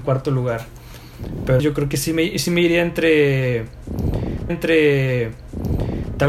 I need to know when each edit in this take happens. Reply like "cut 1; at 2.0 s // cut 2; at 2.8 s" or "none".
cut 1; at 1.6 s // cut 2; at 4.5 s